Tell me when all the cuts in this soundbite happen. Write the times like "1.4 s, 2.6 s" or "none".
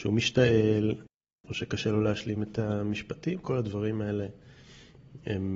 none